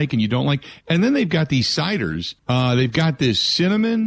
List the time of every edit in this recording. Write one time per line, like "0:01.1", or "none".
0:02.4